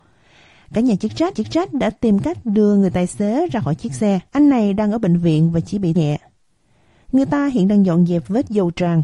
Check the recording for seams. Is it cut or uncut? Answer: cut